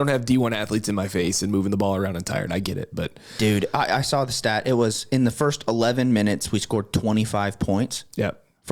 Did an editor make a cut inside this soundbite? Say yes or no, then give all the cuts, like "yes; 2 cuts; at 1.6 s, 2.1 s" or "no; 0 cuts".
no; 0 cuts